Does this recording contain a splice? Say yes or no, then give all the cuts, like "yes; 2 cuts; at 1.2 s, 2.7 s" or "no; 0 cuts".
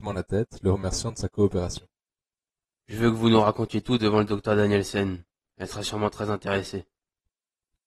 no; 0 cuts